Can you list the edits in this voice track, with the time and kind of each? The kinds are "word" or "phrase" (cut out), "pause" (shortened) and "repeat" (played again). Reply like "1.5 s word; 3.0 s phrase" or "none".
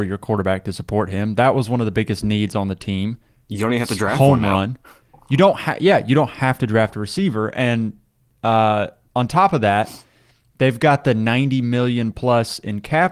none